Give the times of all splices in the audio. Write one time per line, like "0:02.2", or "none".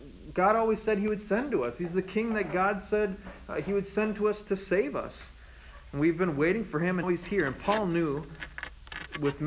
0:07.0